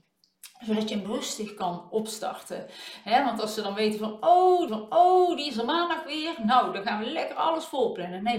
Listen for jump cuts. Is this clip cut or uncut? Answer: cut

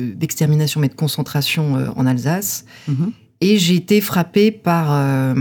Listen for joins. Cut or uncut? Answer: uncut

